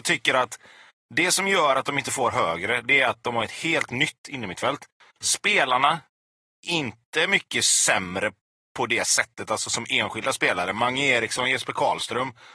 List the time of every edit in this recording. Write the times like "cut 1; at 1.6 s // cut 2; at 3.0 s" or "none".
none